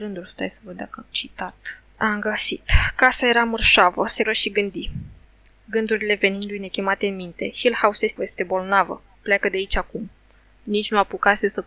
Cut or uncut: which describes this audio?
cut